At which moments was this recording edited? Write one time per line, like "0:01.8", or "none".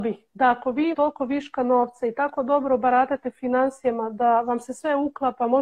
0:00.9

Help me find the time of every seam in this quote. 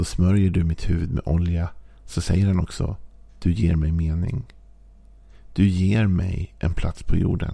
none

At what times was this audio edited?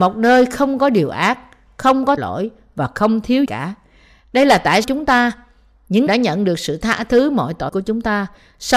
0:02.2
0:03.5
0:04.8
0:06.1
0:07.7

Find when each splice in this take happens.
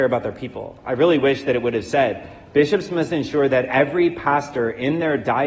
none

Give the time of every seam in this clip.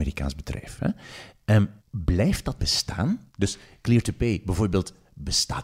0:01.8
0:02.6
0:03.3

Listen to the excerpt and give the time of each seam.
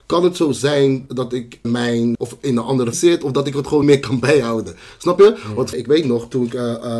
0:01.1
0:01.6
0:02.1
0:02.9
0:03.8
0:05.7

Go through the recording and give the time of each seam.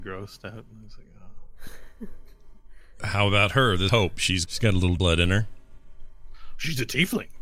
0:03.0
0:03.9
0:04.5
0:05.0

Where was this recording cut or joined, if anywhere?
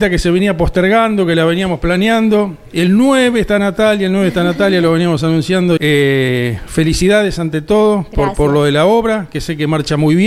0:05.8

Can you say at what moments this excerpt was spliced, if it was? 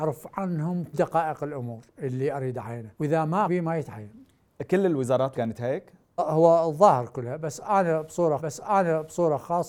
0:00.9
0:02.9
0:03.5
0:05.3
0:06.2
0:08.4

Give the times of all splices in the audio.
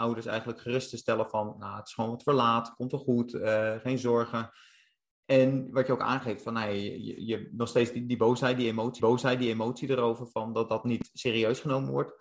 0:09.0

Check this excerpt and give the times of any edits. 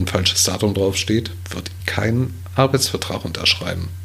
0:01.8

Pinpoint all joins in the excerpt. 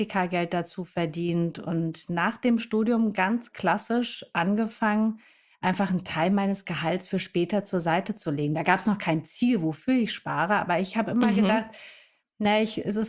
none

